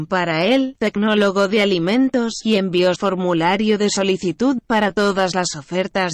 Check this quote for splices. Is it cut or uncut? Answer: cut